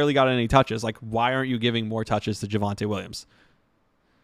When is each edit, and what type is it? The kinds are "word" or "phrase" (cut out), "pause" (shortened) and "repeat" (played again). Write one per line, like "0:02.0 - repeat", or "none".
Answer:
none